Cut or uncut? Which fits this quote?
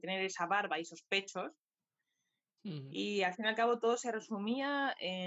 uncut